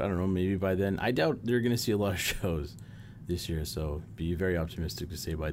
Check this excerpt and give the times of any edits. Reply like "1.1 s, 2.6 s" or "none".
none